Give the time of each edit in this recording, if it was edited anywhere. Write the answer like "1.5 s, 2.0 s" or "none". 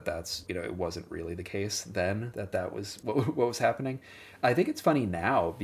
none